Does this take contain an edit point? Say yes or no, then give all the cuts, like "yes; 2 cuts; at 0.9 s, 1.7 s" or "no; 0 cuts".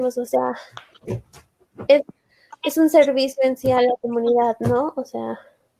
no; 0 cuts